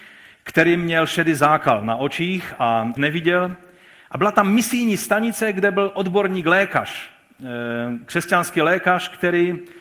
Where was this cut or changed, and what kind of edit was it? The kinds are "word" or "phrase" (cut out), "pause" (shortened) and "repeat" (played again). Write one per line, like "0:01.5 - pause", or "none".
0:03.0 - phrase

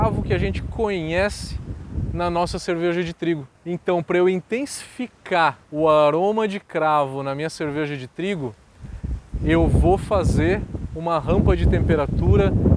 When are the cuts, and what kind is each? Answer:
0:03.6 - pause
0:05.6 - pause

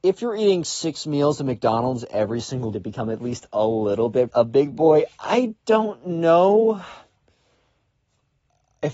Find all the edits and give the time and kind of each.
0:02.7 - phrase
0:04.3 - phrase

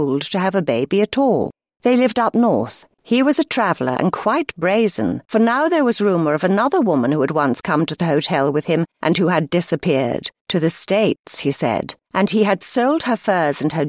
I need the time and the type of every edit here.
0:01.7 - pause
0:02.9 - pause
0:05.2 - pause
0:10.4 - pause
0:12.0 - pause

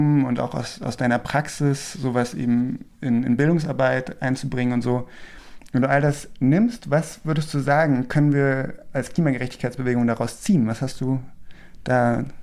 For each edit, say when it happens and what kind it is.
none

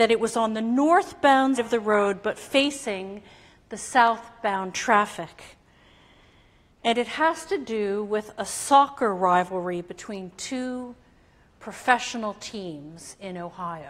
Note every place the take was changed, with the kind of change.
0:01.6 - word

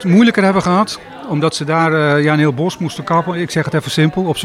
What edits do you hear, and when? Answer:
none

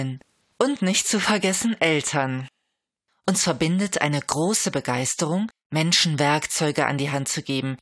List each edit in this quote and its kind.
none

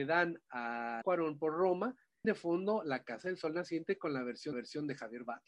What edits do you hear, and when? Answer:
0:01.0 - word
0:02.2 - word
0:04.5 - repeat

